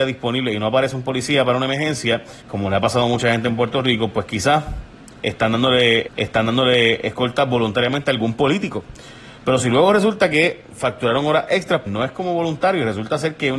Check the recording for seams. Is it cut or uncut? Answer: cut